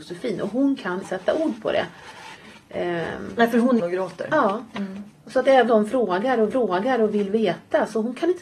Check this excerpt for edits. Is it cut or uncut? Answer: cut